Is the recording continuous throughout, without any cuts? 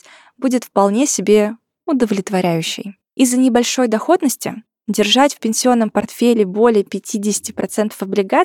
no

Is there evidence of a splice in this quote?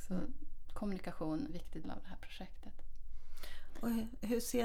yes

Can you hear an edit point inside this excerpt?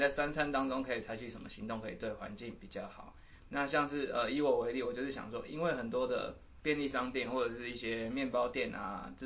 no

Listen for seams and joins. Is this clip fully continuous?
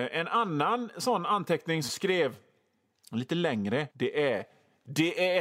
no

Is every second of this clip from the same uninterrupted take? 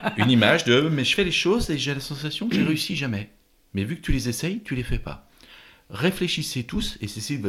yes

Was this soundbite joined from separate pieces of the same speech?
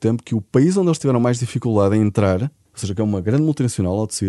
yes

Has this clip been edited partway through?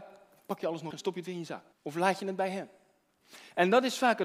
yes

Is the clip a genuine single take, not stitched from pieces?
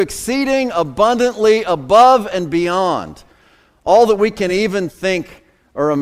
yes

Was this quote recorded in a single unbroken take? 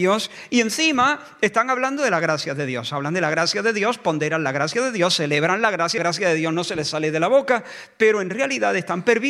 no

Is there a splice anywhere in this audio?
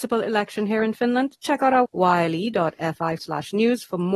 yes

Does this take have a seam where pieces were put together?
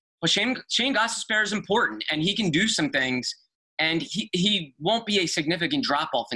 no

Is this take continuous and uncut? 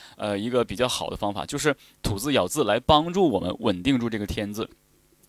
yes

